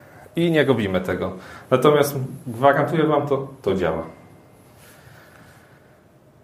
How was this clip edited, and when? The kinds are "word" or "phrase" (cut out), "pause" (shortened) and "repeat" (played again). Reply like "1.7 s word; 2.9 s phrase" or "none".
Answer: none